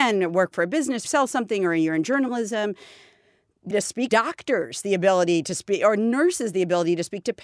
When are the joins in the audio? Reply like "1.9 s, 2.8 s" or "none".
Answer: 1.0 s, 3.7 s, 4.1 s

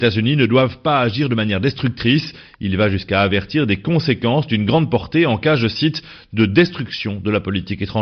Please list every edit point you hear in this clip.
none

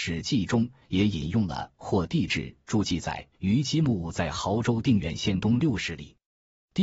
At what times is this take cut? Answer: 3.3 s

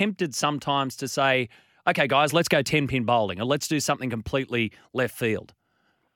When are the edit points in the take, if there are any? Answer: none

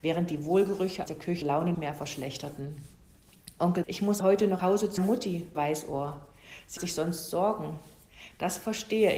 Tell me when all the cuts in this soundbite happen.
1.1 s, 1.4 s, 1.7 s, 3.8 s, 4.2 s, 4.6 s, 5.0 s, 5.5 s, 6.8 s

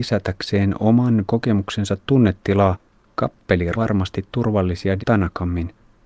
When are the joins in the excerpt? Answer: 1.3 s, 3.7 s, 5.0 s

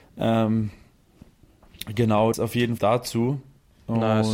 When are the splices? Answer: 2.3 s, 2.8 s

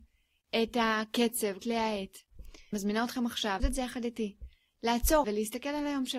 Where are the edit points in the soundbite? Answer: 1.6 s, 2.7 s, 3.6 s, 5.2 s

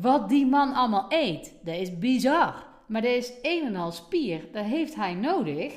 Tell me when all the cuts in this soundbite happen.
none

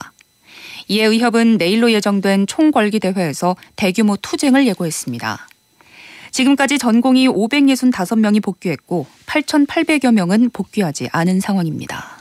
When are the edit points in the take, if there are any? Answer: none

